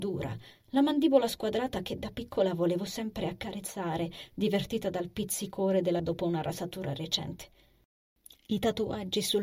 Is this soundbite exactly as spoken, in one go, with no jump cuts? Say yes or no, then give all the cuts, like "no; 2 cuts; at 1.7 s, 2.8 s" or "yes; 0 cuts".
no; 1 cut; at 6.0 s